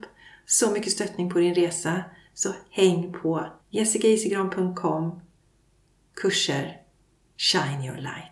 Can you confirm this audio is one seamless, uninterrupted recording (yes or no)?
no